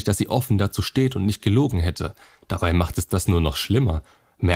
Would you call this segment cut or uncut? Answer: uncut